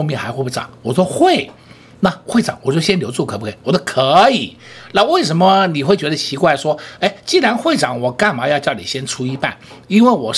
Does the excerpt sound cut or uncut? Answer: uncut